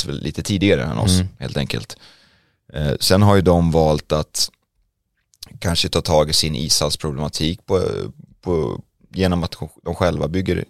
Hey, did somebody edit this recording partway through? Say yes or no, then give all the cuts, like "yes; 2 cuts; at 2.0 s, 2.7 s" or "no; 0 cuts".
yes; 1 cut; at 9.0 s